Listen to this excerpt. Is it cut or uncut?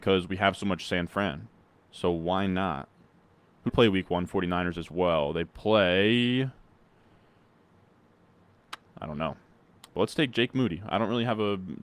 cut